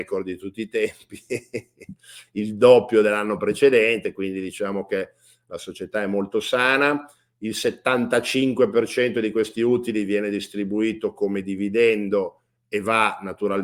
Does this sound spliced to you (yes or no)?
no